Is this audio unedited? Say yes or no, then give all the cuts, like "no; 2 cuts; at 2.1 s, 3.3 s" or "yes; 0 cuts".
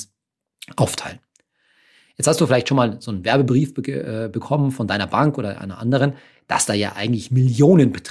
yes; 0 cuts